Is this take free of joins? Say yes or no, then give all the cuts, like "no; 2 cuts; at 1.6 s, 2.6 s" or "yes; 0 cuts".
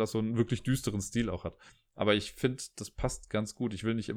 no; 1 cut; at 1.7 s